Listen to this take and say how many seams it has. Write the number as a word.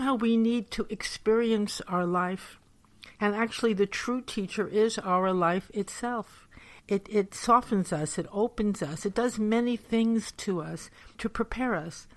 three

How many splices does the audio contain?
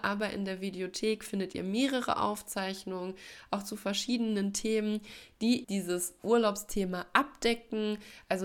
one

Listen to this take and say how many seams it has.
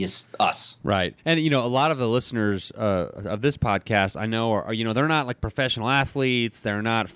one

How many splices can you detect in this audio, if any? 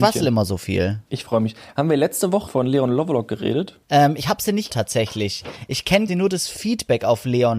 four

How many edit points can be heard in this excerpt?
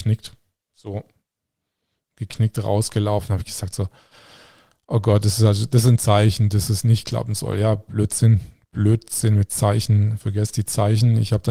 zero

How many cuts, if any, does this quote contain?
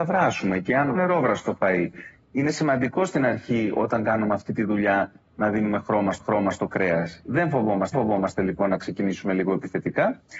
three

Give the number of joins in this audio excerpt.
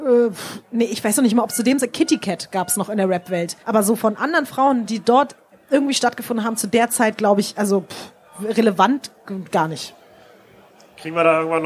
one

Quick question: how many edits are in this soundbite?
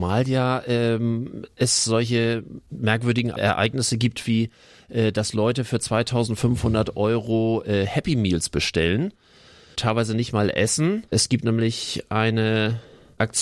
one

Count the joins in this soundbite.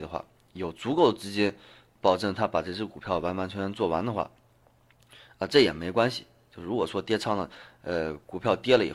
zero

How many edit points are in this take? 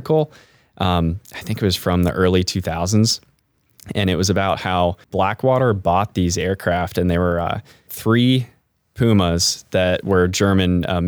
two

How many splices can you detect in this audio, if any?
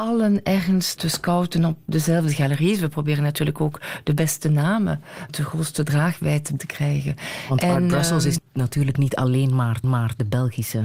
six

